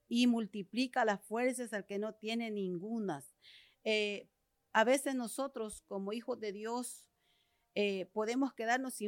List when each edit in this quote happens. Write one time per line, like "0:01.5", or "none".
none